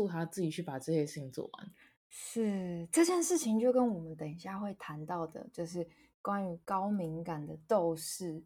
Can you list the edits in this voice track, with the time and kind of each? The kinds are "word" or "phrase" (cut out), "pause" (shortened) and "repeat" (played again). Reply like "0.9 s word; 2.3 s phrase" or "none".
none

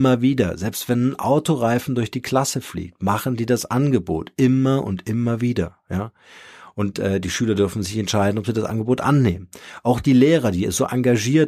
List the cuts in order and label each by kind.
none

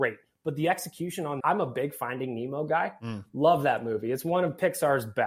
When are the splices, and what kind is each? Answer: 1.4 s phrase

